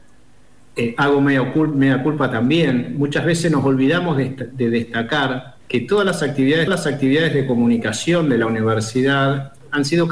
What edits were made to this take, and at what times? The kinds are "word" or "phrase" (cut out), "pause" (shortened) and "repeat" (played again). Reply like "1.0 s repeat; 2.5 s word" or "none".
5.6 s pause; 6.7 s repeat